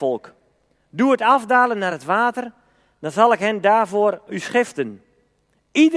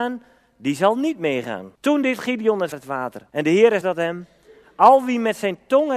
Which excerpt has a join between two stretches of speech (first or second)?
second